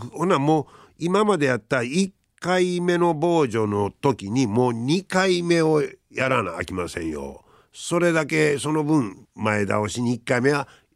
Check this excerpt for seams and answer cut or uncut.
cut